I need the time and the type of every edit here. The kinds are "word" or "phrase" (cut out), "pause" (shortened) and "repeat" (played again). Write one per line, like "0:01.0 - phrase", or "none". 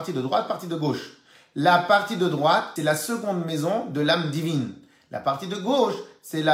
0:02.8 - phrase